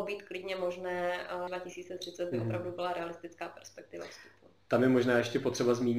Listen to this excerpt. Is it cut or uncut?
cut